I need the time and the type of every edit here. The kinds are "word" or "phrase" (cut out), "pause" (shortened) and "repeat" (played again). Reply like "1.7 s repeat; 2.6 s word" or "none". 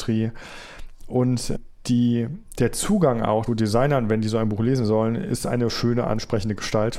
3.5 s word